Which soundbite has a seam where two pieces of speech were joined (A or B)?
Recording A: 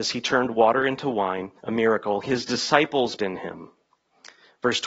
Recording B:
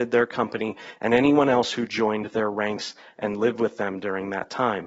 A